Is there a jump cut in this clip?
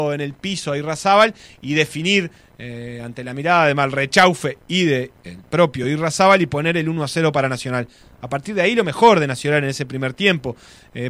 no; 0 cuts

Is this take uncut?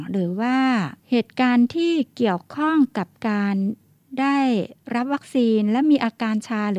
no; 1 cut; at 1.0 s

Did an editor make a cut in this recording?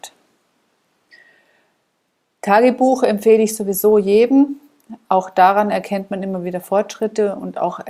no; 0 cuts

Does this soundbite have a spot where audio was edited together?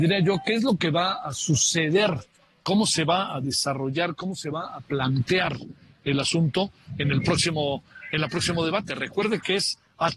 no; 0 cuts

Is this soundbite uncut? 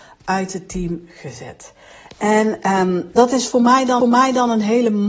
no; 1 cut; at 4.0 s

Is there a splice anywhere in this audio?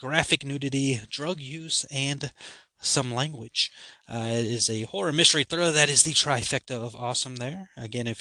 no; 0 cuts

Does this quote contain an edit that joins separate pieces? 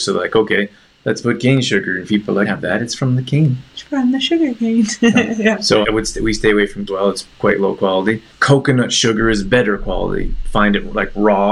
yes; 6 cuts; at 2.1 s, 2.4 s, 3.7 s, 5.8 s, 6.9 s, 8.3 s

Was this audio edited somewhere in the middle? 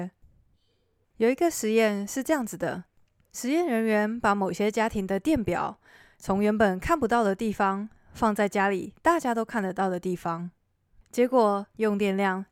no; 0 cuts

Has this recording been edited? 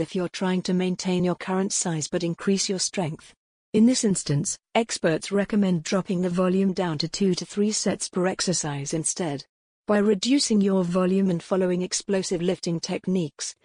no; 0 cuts

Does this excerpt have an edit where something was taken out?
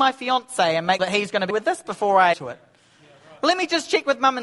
yes; 3 cuts; at 1.0 s, 1.5 s, 2.3 s

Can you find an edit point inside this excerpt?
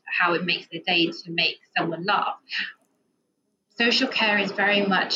no; 0 cuts

